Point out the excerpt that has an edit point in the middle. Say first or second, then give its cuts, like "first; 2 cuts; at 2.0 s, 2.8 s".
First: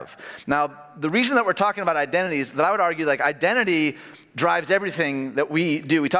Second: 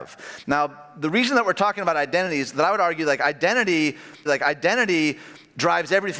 second; 1 cut; at 4.3 s